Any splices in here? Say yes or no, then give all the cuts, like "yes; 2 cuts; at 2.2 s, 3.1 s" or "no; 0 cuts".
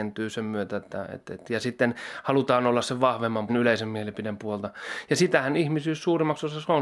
yes; 1 cut; at 3.5 s